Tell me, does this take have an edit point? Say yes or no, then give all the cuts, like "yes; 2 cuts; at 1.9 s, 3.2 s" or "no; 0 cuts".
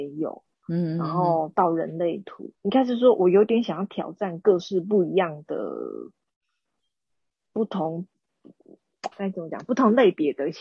yes; 2 cuts; at 2.5 s, 9.1 s